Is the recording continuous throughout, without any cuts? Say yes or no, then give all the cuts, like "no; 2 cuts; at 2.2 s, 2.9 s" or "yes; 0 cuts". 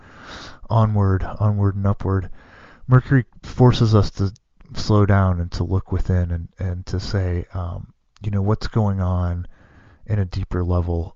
yes; 0 cuts